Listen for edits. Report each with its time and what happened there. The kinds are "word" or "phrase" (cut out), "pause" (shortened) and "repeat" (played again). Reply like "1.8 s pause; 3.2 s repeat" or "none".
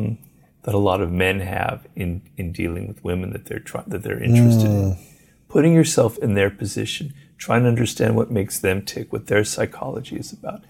none